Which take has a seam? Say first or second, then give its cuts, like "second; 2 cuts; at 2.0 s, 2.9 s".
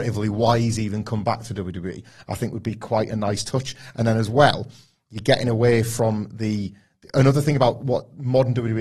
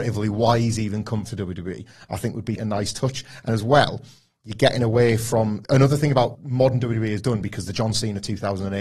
second; 5 cuts; at 1.2 s, 2.6 s, 3.5 s, 5.6 s, 6.3 s